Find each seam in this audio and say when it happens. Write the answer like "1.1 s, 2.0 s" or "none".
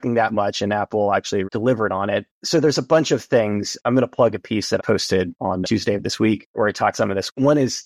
1.4 s, 4.8 s, 5.6 s, 6.9 s